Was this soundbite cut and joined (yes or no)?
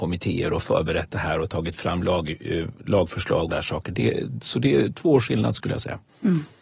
yes